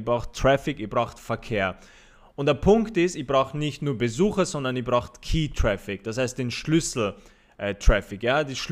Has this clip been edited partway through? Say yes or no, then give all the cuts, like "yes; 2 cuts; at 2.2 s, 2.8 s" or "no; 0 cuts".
no; 0 cuts